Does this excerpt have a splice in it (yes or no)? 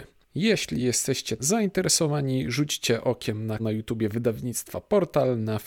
yes